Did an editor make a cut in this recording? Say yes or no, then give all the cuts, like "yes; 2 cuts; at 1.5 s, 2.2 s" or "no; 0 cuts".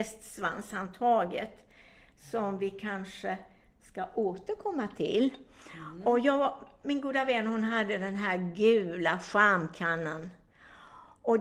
no; 0 cuts